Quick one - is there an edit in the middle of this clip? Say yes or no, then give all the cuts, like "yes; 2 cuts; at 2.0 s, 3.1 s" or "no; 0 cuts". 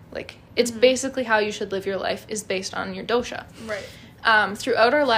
no; 0 cuts